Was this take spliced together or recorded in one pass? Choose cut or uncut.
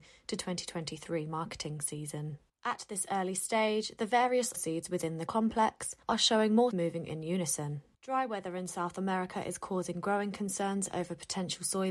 cut